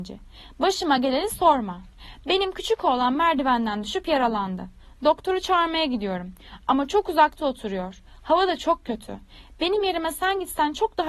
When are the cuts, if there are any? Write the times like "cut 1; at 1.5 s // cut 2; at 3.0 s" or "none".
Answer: none